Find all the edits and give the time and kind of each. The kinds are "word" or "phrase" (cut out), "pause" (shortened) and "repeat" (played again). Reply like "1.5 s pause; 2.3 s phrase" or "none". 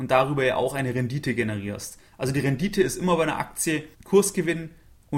3.9 s pause